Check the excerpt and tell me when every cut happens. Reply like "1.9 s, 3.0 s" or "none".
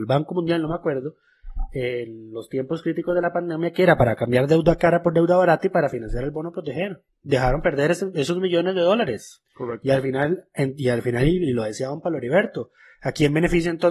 7.1 s, 9.5 s